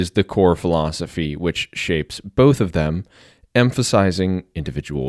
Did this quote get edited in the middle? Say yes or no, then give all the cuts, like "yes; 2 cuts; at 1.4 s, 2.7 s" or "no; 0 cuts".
no; 0 cuts